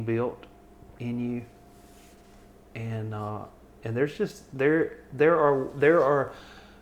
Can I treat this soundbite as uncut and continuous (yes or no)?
yes